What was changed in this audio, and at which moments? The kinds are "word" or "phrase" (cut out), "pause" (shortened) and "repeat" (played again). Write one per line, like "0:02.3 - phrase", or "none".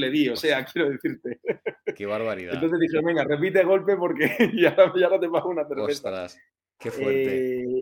none